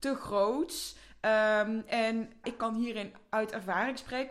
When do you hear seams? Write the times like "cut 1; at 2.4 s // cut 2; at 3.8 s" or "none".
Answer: cut 1; at 2.4 s